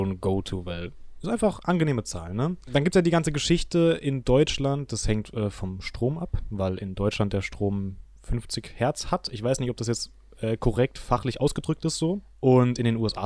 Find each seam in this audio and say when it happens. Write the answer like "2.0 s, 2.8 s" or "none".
none